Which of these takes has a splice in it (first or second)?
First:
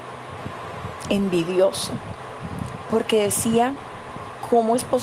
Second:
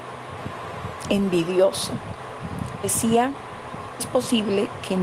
second